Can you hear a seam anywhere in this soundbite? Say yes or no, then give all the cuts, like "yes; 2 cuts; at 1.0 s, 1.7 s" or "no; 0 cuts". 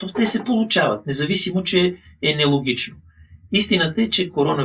no; 0 cuts